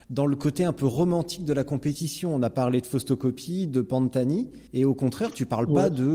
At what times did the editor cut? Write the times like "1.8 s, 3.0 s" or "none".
4.7 s